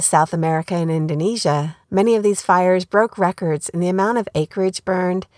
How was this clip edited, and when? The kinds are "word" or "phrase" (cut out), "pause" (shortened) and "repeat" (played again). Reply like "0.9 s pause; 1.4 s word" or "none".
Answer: 1.8 s pause